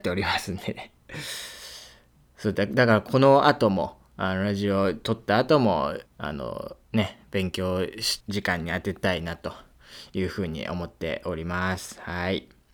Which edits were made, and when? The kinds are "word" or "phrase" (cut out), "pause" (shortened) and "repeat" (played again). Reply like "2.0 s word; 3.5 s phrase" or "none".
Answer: 6.1 s pause; 6.8 s pause; 8.2 s pause